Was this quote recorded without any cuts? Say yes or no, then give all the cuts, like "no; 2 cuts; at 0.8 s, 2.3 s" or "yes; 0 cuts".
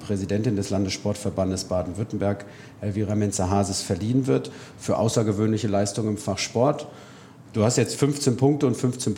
yes; 0 cuts